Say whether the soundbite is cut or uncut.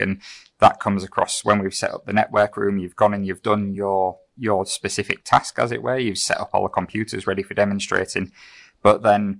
uncut